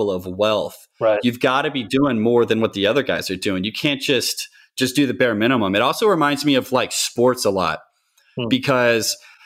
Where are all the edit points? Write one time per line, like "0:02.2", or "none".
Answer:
none